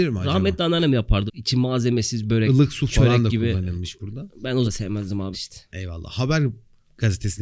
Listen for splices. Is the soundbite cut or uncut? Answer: cut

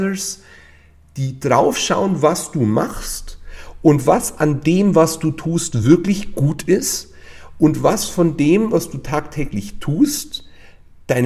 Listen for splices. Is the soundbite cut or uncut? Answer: uncut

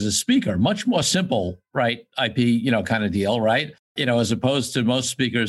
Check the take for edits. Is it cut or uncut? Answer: uncut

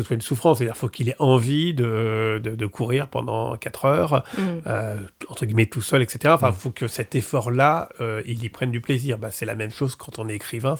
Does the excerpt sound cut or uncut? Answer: uncut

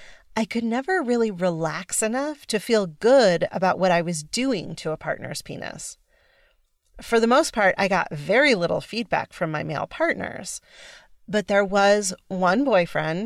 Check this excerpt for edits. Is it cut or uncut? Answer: uncut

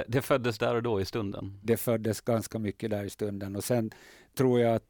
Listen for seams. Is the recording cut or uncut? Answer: uncut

